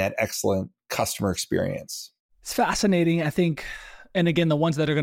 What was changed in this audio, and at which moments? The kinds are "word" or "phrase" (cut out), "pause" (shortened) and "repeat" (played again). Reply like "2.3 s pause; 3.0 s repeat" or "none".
none

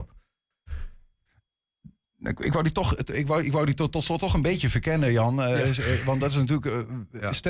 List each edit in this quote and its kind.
none

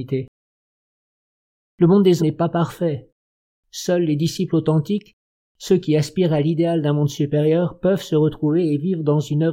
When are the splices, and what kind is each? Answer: 2.2 s word

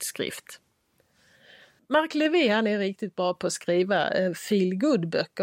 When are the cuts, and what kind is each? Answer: none

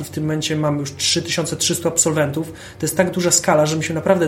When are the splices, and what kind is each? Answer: none

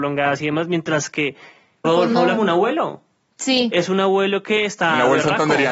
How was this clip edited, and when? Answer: 1.8 s word; 2.4 s word

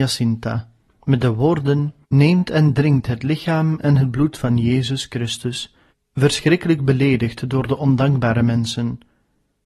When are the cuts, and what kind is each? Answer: 2.0 s pause; 5.9 s pause

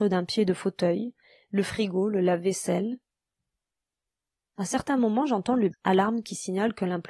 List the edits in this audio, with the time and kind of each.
5.7 s word

